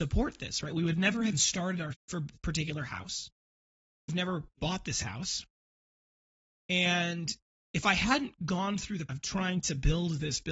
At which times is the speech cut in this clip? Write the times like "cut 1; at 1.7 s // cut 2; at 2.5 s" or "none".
cut 1; at 1.3 s // cut 2; at 1.9 s // cut 3; at 2.3 s // cut 4; at 4.1 s // cut 5; at 4.6 s // cut 6; at 9.1 s